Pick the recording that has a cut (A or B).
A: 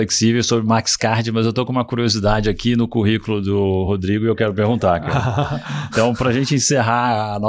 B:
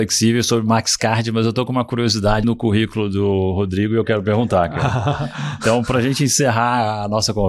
B